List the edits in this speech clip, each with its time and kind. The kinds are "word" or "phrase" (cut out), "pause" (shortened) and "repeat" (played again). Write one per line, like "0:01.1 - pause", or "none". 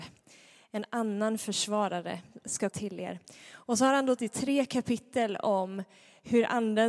0:02.7 - word
0:04.2 - word